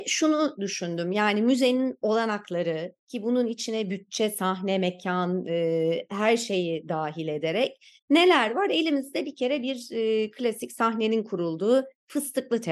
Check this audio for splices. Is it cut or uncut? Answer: cut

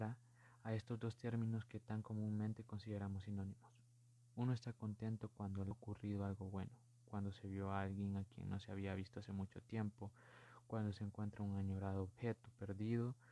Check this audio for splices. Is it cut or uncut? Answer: cut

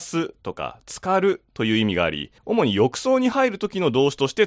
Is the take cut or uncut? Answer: cut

